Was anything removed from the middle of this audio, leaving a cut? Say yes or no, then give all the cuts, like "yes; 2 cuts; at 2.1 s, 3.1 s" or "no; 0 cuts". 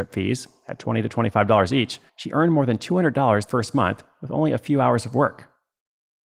yes; 2 cuts; at 2.1 s, 3.5 s